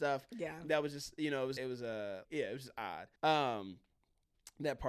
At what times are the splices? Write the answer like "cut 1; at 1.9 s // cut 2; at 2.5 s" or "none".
cut 1; at 1.6 s // cut 2; at 2.2 s // cut 3; at 3.2 s